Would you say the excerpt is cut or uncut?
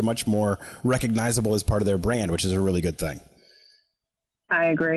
uncut